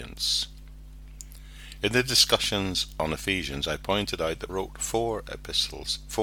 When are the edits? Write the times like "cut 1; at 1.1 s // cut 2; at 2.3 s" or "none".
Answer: cut 1; at 4.5 s